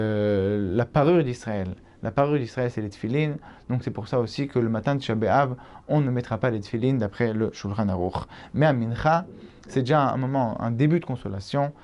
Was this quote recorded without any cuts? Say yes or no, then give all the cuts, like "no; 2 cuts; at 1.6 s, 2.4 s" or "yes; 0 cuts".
yes; 0 cuts